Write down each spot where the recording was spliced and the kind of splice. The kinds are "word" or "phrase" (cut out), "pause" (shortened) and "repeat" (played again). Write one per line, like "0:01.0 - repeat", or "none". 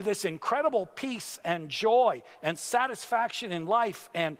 none